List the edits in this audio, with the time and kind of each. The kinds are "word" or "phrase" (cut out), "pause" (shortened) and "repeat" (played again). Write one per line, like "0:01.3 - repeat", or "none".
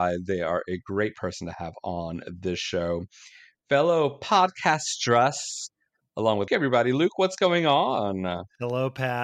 0:06.5 - phrase